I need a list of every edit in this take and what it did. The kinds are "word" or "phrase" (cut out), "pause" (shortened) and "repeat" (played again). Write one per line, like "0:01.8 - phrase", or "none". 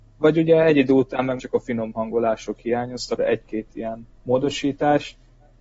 0:01.4 - word
0:03.2 - word
0:04.2 - pause